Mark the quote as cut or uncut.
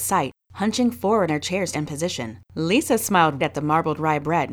cut